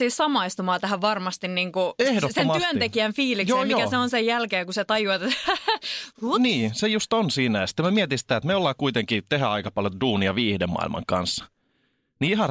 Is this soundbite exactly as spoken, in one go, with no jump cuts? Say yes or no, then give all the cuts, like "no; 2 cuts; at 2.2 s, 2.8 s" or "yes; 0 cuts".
yes; 0 cuts